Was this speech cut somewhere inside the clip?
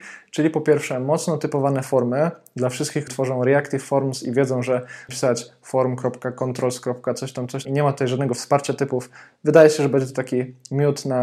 yes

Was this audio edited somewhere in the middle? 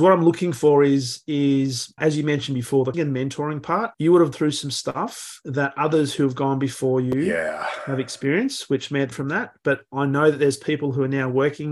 yes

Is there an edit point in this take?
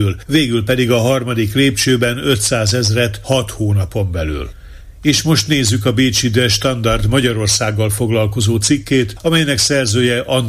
no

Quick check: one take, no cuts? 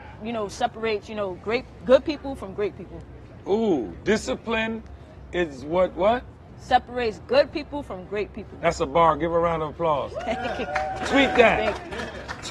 yes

